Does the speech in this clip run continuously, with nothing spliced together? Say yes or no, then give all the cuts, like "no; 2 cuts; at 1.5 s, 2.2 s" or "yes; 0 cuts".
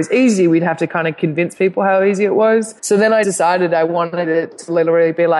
no; 2 cuts; at 2.8 s, 3.2 s